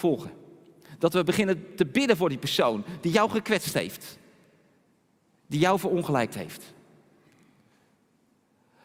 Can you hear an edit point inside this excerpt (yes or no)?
no